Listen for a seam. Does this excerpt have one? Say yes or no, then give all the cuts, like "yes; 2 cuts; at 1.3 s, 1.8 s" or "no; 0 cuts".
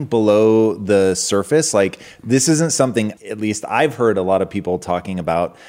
yes; 1 cut; at 3.2 s